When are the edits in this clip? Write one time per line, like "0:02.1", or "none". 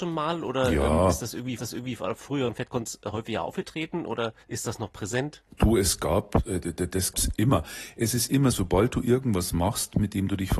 0:01.6
0:04.4
0:05.5
0:07.1
0:08.5